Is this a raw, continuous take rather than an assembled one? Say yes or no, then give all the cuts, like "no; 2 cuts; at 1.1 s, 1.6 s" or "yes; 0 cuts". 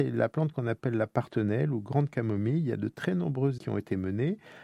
no; 1 cut; at 3.6 s